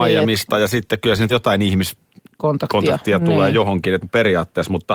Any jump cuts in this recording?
yes; 2 cuts; at 1.3 s, 4.0 s

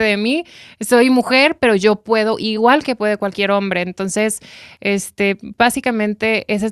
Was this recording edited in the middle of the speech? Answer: no; 0 cuts

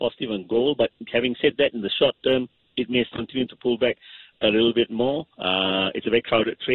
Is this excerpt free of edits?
no; 2 cuts; at 3.1 s, 5.3 s

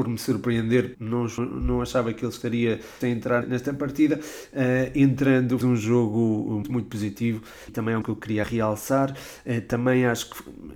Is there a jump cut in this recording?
yes; 9 cuts; at 0.9 s, 1.4 s, 3.0 s, 3.4 s, 5.6 s, 6.6 s, 7.7 s, 8.0 s, 8.4 s

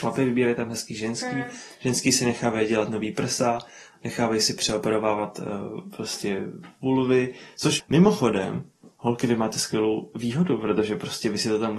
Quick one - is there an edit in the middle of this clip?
no; 0 cuts

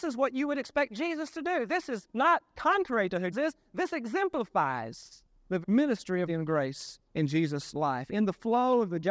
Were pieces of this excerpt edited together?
yes; 4 cuts; at 3.3 s, 5.6 s, 6.3 s, 7.1 s

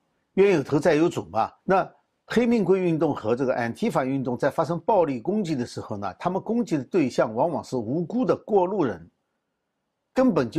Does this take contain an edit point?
yes; 1 cut; at 1.6 s

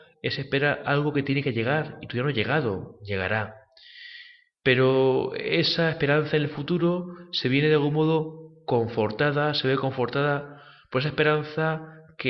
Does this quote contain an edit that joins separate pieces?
no; 0 cuts

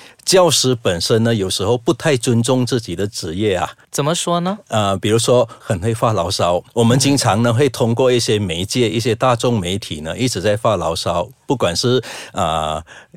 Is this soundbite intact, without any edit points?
no; 2 cuts; at 5.6 s, 6.7 s

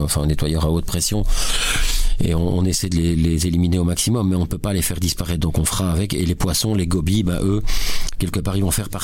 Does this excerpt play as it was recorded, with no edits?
yes; 0 cuts

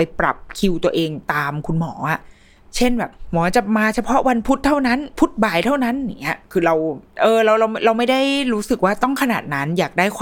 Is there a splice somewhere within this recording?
no; 0 cuts

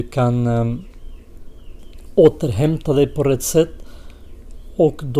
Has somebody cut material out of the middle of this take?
no; 0 cuts

